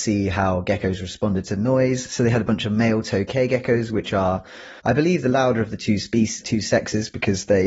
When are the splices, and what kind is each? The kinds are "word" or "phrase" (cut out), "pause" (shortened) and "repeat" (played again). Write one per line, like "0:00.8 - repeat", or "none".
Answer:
0:04.8 - pause
0:06.4 - word